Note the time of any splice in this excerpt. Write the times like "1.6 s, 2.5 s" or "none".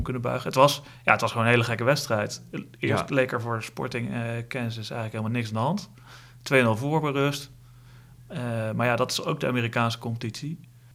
none